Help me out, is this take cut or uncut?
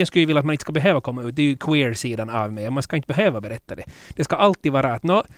uncut